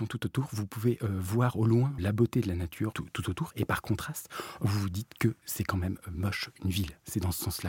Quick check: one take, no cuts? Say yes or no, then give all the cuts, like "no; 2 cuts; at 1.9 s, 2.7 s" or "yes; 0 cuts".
no; 2 cuts; at 2.0 s, 2.9 s